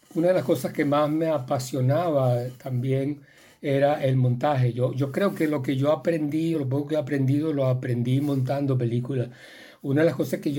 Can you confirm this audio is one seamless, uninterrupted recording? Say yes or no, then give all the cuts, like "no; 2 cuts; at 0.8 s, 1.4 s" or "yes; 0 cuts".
yes; 0 cuts